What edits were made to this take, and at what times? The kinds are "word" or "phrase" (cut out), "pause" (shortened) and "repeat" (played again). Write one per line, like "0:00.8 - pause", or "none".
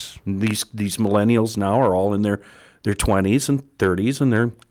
none